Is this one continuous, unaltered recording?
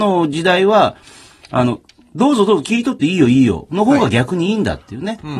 yes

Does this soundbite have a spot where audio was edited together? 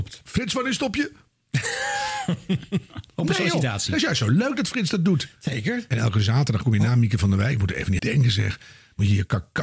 yes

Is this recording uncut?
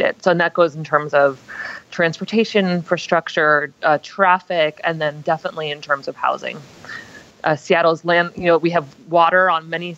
yes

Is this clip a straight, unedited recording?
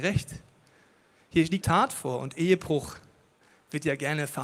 no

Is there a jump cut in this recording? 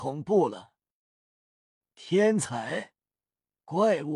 no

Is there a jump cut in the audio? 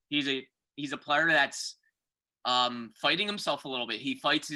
no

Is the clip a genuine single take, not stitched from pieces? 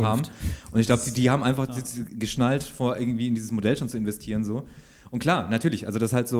yes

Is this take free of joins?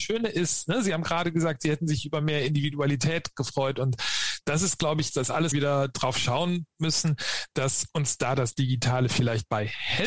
no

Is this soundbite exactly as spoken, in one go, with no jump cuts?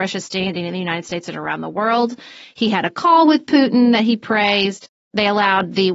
yes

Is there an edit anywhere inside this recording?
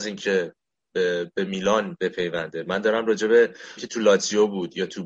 yes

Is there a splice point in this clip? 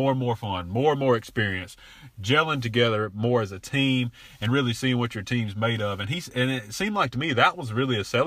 no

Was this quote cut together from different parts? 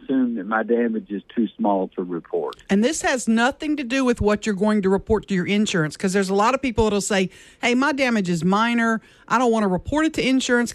no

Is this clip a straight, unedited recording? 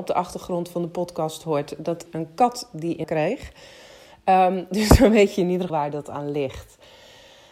no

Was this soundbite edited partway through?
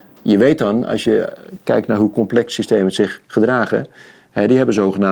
no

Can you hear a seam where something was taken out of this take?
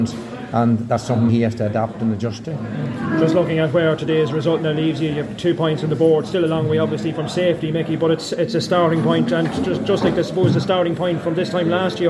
yes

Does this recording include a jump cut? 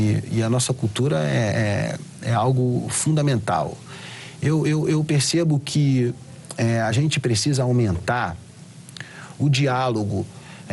no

